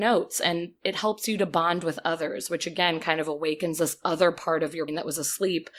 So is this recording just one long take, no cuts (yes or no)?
no